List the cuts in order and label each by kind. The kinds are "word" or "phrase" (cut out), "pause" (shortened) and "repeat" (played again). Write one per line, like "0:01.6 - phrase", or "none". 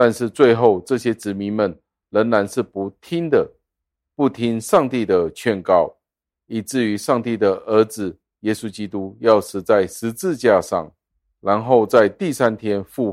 none